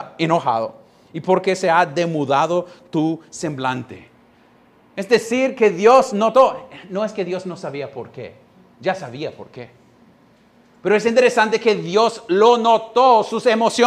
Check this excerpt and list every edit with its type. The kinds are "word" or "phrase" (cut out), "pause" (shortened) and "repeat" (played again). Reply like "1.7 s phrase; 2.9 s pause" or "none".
none